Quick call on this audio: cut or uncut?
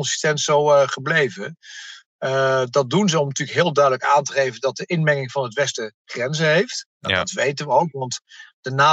uncut